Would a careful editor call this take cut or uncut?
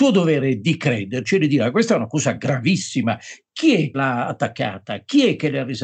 cut